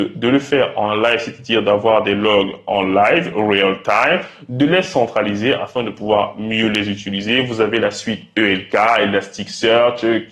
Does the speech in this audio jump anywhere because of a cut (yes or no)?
no